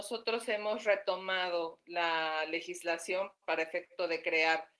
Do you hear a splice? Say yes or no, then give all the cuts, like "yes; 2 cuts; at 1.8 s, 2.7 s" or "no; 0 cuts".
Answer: no; 0 cuts